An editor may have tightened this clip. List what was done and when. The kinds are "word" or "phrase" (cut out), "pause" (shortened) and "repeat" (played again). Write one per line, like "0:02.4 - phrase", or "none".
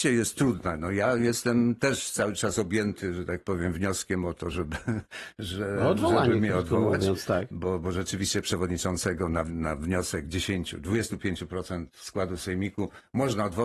none